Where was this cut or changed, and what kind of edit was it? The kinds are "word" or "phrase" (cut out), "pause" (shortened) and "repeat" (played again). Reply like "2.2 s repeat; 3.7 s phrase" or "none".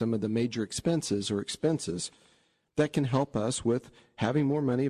none